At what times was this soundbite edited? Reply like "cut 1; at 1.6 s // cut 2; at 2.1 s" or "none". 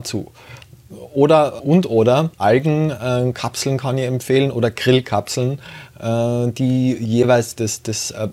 cut 1; at 1.6 s // cut 2; at 2.3 s

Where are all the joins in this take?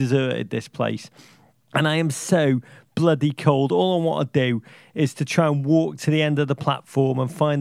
none

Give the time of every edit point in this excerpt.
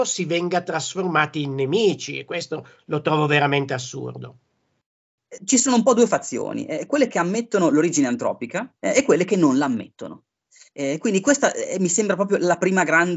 cut 1; at 8.8 s

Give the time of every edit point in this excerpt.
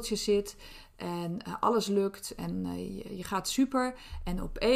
none

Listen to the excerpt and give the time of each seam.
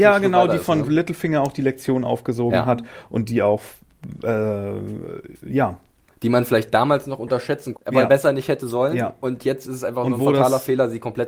cut 1; at 7.7 s

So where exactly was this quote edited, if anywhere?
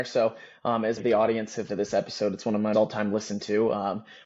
cut 1; at 1.0 s // cut 2; at 1.7 s // cut 3; at 2.7 s

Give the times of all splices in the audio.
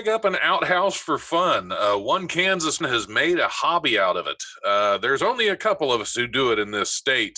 cut 1; at 2.8 s

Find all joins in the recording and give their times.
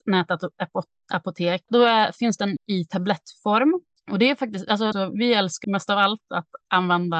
cut 1; at 1.7 s // cut 2; at 2.6 s // cut 3; at 4.9 s // cut 4; at 5.6 s

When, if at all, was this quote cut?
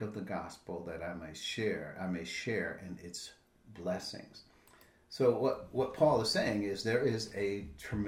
none

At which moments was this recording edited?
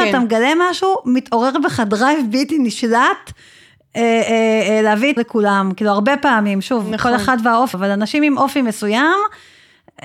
cut 1; at 5.2 s // cut 2; at 7.7 s

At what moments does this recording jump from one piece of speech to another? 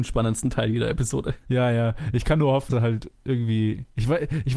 cut 1; at 2.7 s

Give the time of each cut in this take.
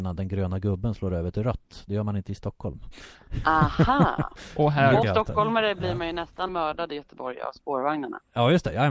cut 1; at 5.0 s // cut 2; at 6.5 s

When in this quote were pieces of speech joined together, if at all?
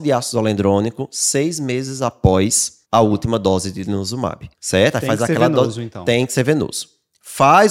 cut 1; at 2.8 s // cut 2; at 4.5 s

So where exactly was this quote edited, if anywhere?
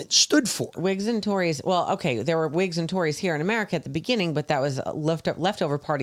none

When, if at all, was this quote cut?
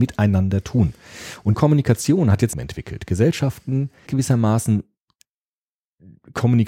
cut 1; at 1.5 s // cut 2; at 2.5 s // cut 3; at 4.1 s

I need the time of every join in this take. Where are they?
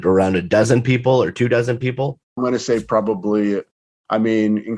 cut 1; at 2.2 s

